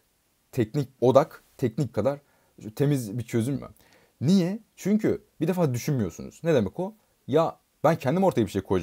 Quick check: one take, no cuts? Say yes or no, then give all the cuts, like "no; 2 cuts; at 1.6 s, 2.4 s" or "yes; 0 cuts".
no; 4 cuts; at 1.0 s, 1.9 s, 3.5 s, 5.3 s